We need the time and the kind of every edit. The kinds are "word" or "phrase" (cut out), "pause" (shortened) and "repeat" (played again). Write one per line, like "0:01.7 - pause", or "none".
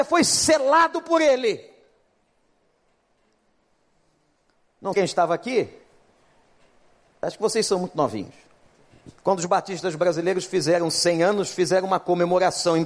0:04.9 - word
0:09.2 - pause